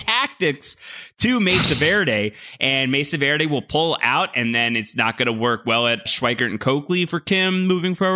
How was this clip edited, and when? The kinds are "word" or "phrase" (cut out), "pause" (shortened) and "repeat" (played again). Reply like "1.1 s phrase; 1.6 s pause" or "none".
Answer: 6.1 s word